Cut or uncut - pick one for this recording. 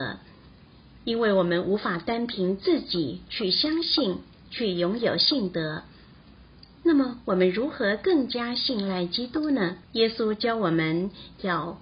cut